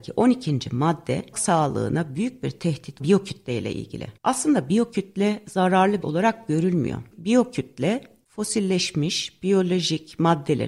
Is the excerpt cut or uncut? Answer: cut